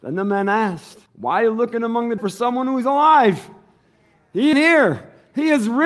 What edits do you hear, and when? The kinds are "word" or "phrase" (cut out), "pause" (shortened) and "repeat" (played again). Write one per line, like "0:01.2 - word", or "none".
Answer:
0:01.1 - pause
0:02.2 - word
0:04.5 - word